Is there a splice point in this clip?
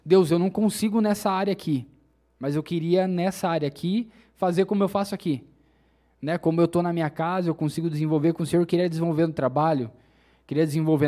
no; 0 cuts

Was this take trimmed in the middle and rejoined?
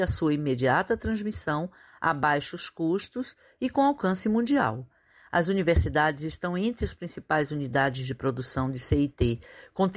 no; 0 cuts

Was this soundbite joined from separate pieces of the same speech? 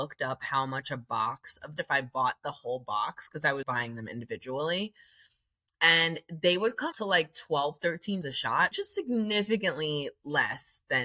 yes; 5 cuts; at 1.8 s, 3.6 s, 6.9 s, 8.2 s, 8.7 s

